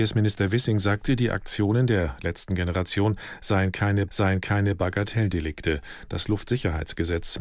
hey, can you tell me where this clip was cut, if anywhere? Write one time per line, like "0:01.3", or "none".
0:04.1